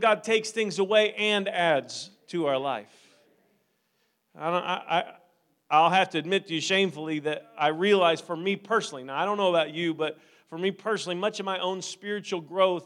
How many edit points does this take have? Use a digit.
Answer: 0